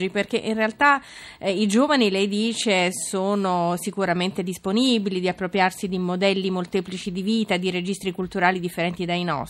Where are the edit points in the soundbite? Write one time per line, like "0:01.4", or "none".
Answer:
none